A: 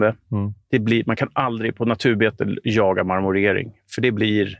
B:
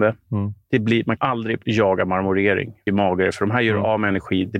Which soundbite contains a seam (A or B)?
B